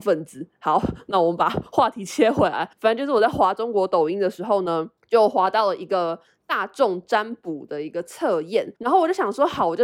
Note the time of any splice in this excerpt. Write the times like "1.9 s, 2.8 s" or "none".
2.7 s, 5.0 s, 8.8 s

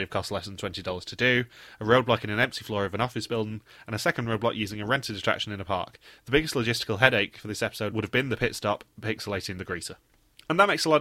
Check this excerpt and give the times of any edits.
none

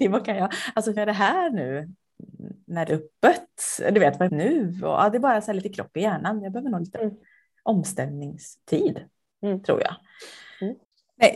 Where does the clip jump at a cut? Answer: 1.0 s, 2.9 s, 4.3 s

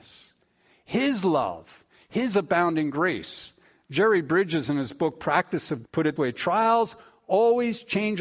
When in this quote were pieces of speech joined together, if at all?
5.8 s, 6.2 s

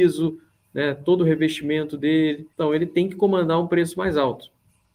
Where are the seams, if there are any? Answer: 2.5 s

